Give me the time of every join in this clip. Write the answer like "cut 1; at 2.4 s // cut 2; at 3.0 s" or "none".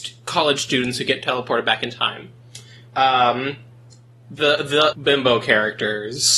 cut 1; at 4.4 s // cut 2; at 4.9 s